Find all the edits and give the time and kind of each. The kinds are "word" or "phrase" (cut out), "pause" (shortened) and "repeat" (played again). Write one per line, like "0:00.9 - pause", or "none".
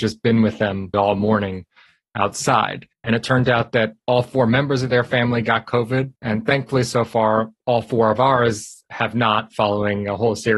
0:00.9 - word
0:02.9 - pause
0:06.2 - pause